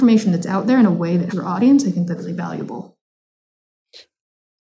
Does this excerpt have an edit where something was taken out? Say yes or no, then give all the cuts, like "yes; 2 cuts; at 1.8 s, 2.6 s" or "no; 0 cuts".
yes; 2 cuts; at 1.3 s, 2.2 s